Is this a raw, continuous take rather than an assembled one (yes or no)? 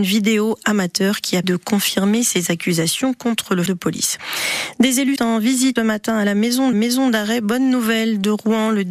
no